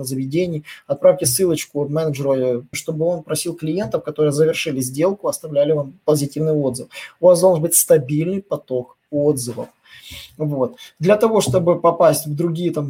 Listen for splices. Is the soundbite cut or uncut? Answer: cut